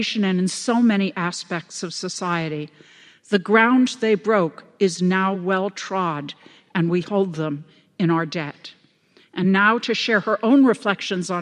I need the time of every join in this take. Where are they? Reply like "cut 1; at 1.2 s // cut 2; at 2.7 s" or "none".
none